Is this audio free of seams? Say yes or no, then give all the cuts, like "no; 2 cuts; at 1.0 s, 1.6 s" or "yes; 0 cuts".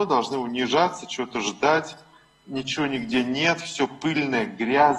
yes; 0 cuts